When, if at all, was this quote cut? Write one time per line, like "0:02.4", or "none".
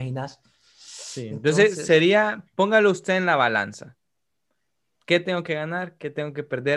none